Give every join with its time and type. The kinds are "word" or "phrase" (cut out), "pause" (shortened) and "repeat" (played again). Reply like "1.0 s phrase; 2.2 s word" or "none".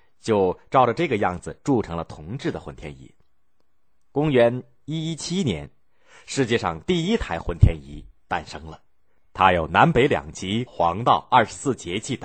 10.7 s phrase